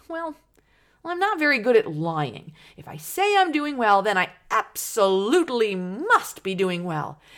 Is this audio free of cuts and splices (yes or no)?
yes